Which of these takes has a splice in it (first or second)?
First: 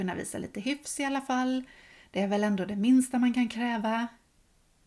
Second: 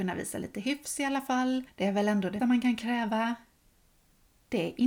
second